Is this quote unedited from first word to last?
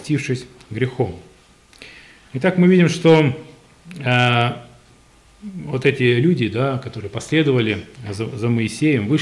yes; 0 cuts

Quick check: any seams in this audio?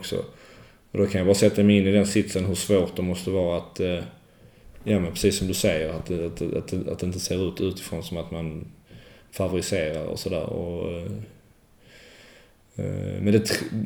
no; 0 cuts

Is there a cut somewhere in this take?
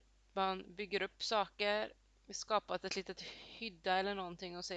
no; 0 cuts

